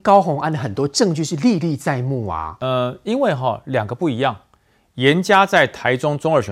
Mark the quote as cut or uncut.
uncut